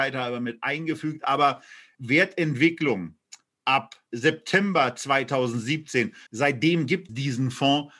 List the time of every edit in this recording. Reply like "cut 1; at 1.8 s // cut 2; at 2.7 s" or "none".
cut 1; at 1.9 s // cut 2; at 4.1 s // cut 3; at 6.3 s // cut 4; at 7.1 s